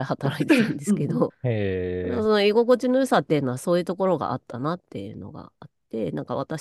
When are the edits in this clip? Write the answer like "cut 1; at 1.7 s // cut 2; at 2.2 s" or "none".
cut 1; at 1.3 s